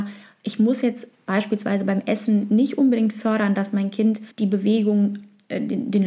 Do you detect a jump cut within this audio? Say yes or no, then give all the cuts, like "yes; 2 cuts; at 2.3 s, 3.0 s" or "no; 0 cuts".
yes; 1 cut; at 4.3 s